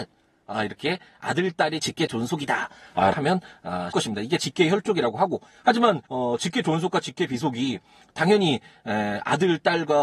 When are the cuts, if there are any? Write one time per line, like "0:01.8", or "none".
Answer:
0:01.8
0:03.1
0:03.9
0:06.1